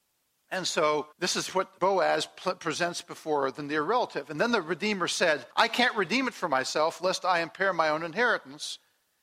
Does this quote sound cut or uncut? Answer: cut